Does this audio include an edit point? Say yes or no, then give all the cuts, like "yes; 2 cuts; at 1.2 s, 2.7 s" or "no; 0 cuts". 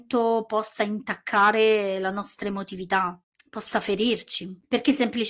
yes; 1 cut; at 3.3 s